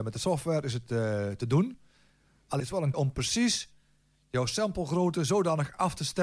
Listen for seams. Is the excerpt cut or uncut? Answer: cut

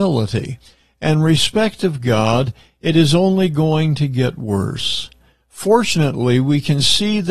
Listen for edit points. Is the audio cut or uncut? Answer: uncut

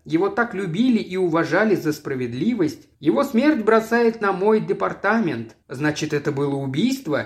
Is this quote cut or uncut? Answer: cut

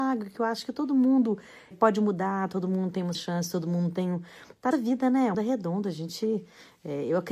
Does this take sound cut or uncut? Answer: cut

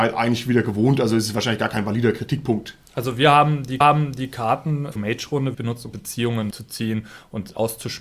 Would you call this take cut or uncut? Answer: cut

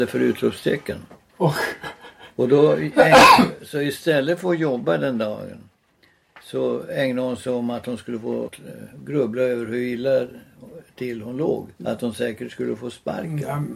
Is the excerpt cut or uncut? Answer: cut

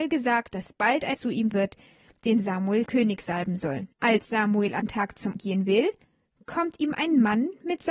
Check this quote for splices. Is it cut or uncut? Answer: cut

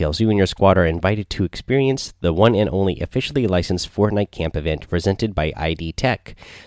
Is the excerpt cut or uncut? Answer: uncut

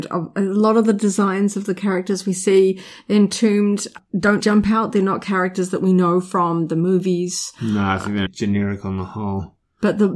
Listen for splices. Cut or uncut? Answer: cut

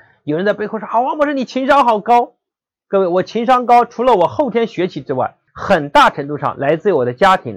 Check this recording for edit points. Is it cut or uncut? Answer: cut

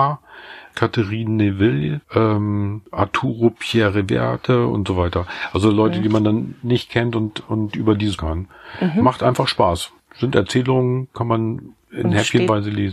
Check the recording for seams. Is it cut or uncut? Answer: cut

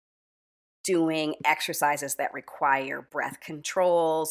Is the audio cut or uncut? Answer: uncut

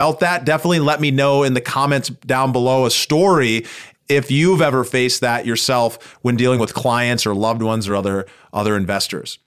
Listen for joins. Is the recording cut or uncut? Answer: uncut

